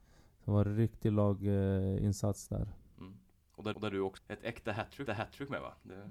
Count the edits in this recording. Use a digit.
3